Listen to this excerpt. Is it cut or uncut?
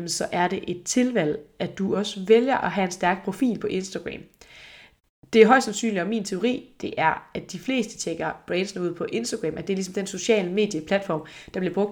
uncut